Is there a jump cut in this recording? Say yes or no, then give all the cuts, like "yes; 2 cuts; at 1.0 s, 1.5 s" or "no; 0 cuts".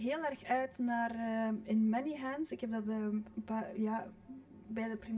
no; 0 cuts